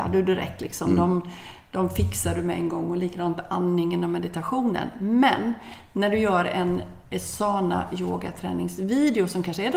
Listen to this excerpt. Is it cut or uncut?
uncut